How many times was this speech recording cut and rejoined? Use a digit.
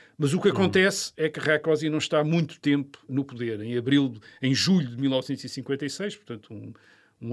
1